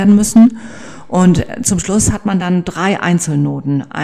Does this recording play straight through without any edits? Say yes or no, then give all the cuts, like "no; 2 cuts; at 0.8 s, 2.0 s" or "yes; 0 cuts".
yes; 0 cuts